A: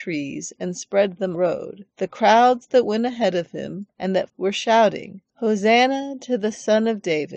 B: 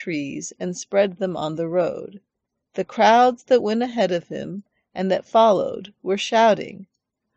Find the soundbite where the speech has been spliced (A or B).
A